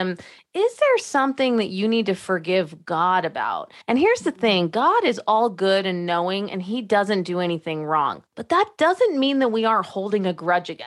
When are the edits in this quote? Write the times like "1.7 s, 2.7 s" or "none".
3.8 s

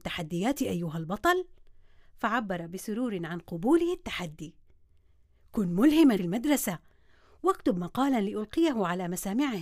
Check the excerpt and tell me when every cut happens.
6.2 s

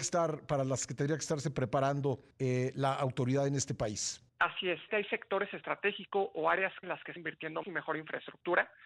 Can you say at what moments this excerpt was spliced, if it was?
2.3 s, 4.3 s, 4.9 s, 6.8 s, 7.2 s, 7.6 s

